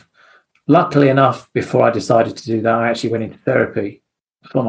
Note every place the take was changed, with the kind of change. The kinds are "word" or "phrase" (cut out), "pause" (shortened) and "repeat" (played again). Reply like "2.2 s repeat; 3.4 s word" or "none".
none